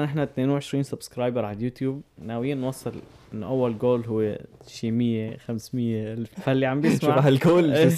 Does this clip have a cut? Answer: yes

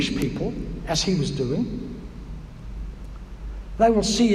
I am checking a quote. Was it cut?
no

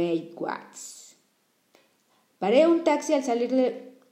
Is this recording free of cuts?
yes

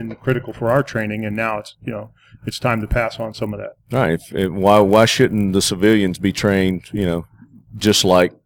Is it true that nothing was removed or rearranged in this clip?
yes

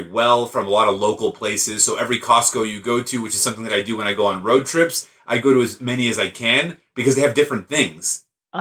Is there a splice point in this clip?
no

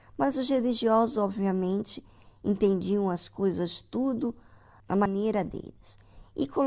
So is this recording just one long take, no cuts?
yes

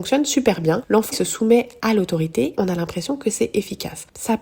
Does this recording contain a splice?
yes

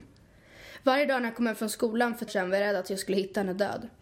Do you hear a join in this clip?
yes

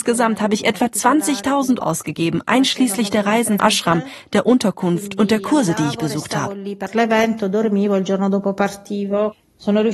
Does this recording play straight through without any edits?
no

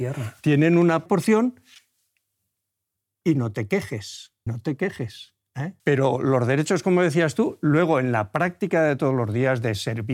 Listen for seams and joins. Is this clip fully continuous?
no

